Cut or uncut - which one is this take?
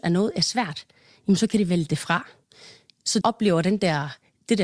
cut